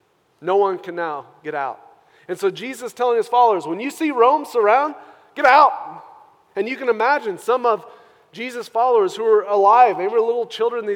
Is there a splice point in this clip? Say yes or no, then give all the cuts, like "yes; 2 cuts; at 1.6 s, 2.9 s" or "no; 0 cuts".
no; 0 cuts